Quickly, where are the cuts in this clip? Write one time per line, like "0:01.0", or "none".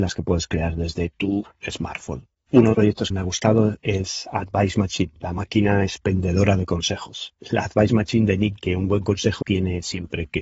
0:02.7
0:03.1
0:07.4
0:08.6
0:09.4